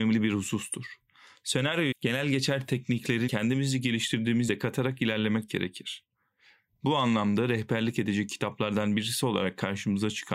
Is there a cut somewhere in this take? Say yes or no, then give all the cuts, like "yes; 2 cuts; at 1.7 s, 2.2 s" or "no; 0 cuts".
yes; 3 cuts; at 1.9 s, 3.3 s, 4.5 s